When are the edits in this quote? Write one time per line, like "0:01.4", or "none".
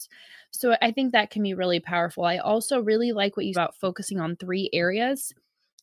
0:03.5